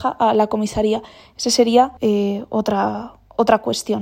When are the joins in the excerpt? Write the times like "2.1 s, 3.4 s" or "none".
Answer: 2.0 s